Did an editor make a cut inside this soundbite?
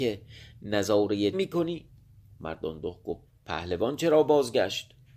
yes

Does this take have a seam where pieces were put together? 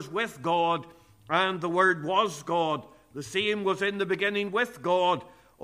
no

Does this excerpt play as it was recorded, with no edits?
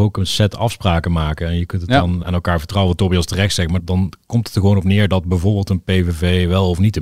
no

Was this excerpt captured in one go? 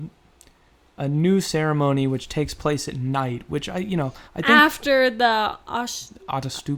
no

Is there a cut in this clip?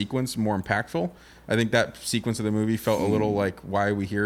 no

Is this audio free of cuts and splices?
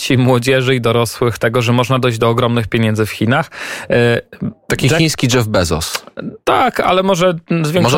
yes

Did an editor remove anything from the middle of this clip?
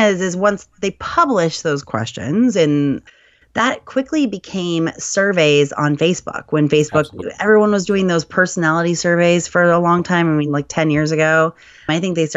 no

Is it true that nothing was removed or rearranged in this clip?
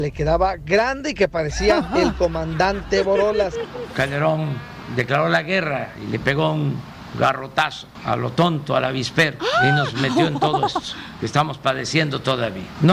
yes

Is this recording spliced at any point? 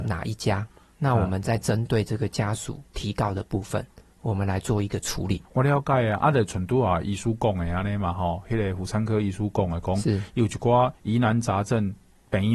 yes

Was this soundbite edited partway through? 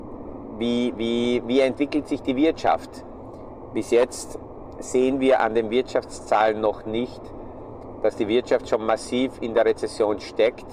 no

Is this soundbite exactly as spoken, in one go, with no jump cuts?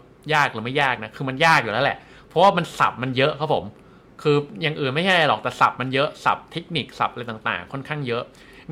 yes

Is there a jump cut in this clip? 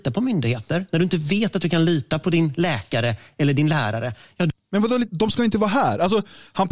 no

